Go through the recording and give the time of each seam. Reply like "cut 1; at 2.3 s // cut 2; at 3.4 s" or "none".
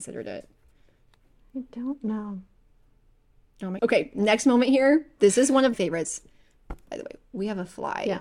cut 1; at 3.8 s // cut 2; at 5.7 s